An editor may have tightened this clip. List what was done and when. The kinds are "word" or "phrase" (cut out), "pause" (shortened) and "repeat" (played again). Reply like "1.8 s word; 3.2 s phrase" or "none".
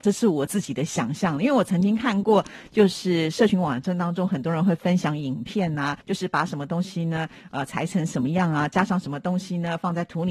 6.0 s pause